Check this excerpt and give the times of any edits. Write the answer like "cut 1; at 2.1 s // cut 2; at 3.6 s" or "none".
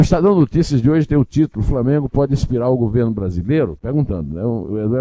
none